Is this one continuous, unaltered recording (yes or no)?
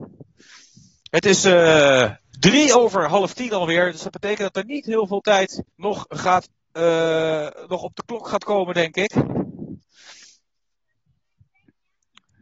no